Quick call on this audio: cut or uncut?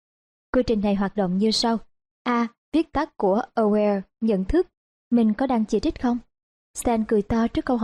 uncut